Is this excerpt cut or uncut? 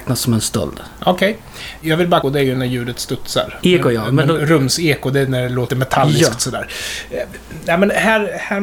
cut